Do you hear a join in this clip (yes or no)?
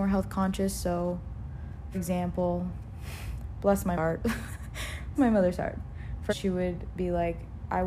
yes